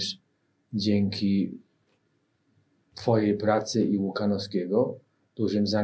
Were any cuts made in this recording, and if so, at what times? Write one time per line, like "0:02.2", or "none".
none